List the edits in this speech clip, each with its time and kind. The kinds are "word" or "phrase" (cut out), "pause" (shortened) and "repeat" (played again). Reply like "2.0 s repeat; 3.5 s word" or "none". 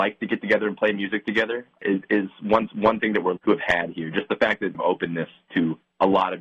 2.7 s repeat; 3.4 s word; 4.7 s phrase